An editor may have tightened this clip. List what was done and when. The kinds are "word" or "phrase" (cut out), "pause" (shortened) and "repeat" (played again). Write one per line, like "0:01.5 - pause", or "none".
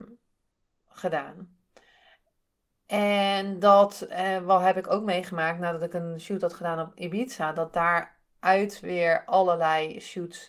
none